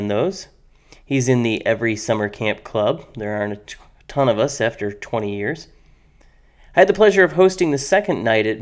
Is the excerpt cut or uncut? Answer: uncut